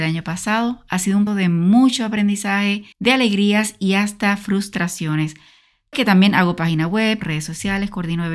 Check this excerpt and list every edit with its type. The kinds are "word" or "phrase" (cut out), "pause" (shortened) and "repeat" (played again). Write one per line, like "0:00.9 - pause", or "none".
0:01.3 - word
0:02.9 - pause
0:05.9 - word
0:07.2 - word